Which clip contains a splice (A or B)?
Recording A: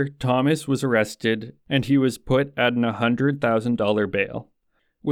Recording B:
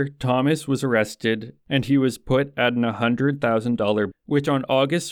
B